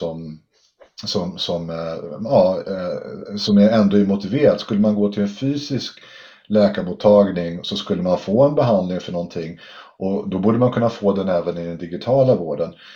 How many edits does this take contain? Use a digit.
0